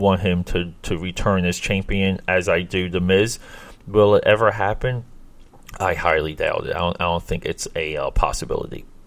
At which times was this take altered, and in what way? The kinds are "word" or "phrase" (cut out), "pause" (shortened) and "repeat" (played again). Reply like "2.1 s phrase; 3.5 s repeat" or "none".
none